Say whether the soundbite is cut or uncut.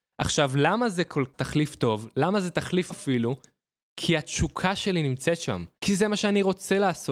cut